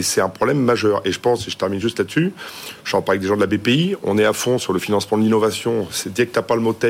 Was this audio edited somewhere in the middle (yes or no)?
no